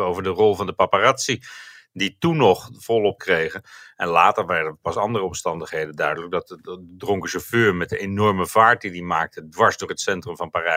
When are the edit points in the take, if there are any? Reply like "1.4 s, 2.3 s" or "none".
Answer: 3.2 s